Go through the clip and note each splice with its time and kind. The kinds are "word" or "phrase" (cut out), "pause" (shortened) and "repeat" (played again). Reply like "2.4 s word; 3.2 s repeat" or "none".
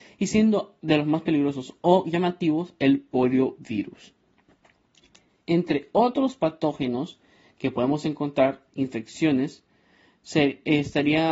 none